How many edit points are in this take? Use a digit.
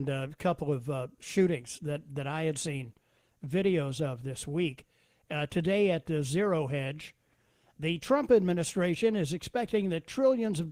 0